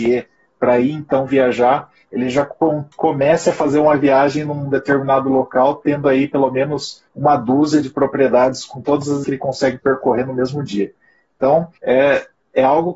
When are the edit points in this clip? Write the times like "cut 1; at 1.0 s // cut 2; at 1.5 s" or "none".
cut 1; at 2.9 s // cut 2; at 7.1 s // cut 3; at 9.2 s // cut 4; at 11.8 s